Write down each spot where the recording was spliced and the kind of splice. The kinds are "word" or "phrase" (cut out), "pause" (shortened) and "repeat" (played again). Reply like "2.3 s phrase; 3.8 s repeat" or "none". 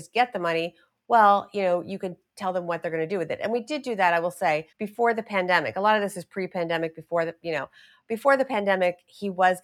4.7 s pause